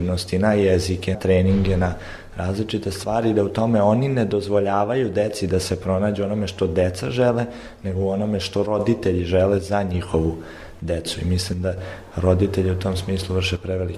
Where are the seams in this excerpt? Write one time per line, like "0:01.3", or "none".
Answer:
0:01.1